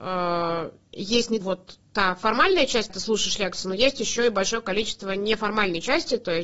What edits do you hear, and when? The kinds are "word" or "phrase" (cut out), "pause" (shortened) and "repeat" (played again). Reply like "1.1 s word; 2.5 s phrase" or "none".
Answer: 1.4 s word; 1.8 s pause; 2.9 s phrase